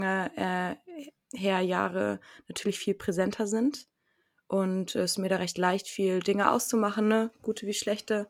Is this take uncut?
yes; 0 cuts

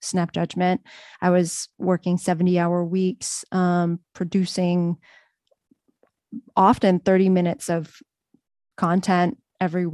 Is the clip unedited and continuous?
yes; 0 cuts

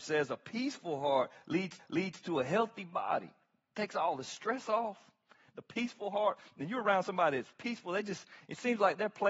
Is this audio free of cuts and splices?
no; 1 cut; at 1.8 s

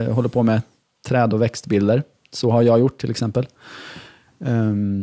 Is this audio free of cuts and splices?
yes; 0 cuts

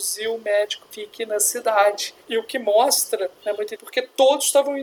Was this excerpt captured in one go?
no; 4 cuts; at 0.9 s, 2.2 s, 3.4 s, 3.8 s

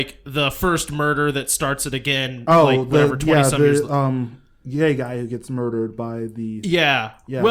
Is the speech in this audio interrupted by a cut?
no; 0 cuts

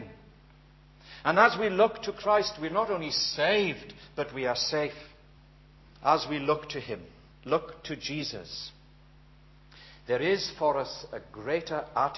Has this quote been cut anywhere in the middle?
yes; 2 cuts; at 5.4 s, 7.3 s

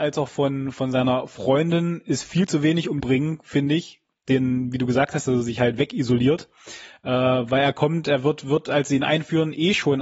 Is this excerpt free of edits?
no; 1 cut; at 3.0 s

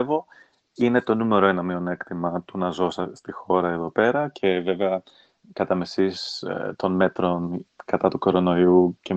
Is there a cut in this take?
no; 0 cuts

